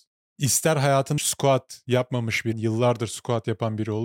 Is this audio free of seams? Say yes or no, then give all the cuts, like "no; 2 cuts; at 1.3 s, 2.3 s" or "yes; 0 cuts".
no; 2 cuts; at 1.2 s, 2.5 s